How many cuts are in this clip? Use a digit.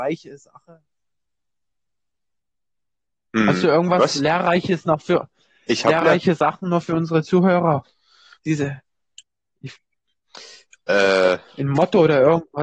0